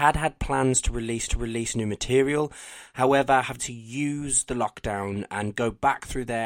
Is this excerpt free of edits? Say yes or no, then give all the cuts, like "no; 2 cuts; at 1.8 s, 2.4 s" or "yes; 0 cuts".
no; 2 cuts; at 1.3 s, 3.6 s